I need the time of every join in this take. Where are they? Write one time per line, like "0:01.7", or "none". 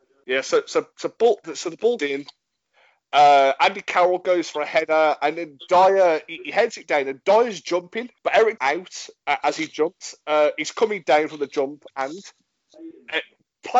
0:02.0
0:08.2
0:08.6
0:11.9